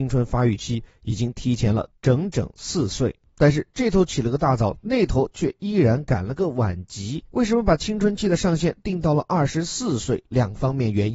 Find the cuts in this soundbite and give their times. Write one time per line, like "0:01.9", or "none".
0:07.3